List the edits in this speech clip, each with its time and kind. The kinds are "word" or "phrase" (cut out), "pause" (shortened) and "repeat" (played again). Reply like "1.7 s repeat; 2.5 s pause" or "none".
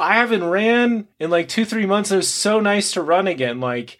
1.1 s pause